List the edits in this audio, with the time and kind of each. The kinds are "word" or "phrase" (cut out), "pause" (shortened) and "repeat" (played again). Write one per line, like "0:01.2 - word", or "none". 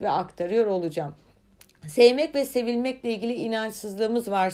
none